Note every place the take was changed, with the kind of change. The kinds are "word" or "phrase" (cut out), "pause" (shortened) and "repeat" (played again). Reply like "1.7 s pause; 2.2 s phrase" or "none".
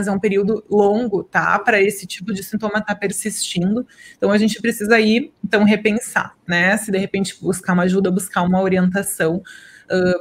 none